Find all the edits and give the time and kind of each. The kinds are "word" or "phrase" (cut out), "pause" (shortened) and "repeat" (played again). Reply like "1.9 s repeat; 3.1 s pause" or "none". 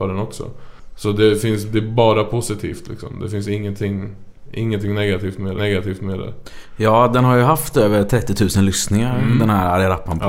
5.6 s repeat